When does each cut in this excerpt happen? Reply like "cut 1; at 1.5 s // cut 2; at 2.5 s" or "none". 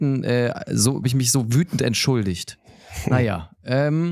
cut 1; at 1.0 s